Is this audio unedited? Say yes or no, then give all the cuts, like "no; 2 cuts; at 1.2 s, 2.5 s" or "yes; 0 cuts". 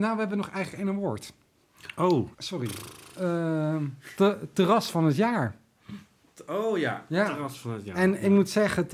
no; 1 cut; at 2.3 s